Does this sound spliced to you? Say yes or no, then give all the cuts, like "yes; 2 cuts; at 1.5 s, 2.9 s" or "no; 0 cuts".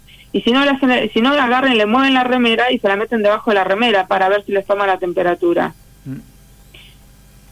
no; 0 cuts